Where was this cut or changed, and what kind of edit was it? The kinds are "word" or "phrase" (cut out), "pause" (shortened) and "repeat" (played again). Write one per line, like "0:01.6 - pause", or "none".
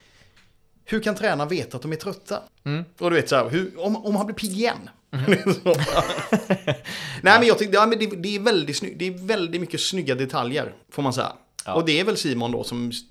0:02.5 - pause
0:10.8 - pause